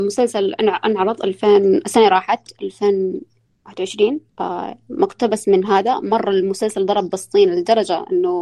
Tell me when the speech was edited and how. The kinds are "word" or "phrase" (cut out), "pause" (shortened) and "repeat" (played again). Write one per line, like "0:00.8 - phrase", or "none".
0:04.3 - pause